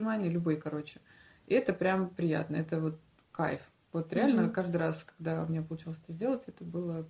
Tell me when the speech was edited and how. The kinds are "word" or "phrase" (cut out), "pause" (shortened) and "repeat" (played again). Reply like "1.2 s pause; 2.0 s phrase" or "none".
none